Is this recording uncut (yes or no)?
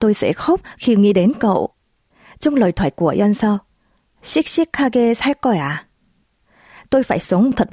yes